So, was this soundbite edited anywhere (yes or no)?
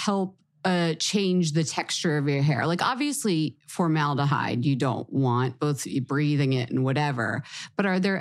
no